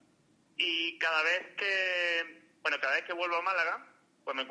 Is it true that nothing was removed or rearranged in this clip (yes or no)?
yes